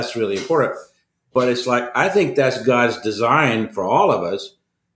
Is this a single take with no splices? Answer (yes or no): yes